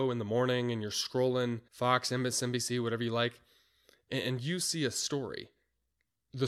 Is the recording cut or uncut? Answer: cut